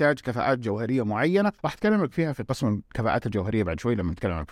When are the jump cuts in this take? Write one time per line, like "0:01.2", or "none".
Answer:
0:01.6